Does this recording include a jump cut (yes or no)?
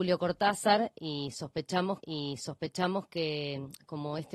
yes